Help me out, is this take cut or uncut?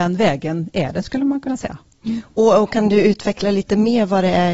uncut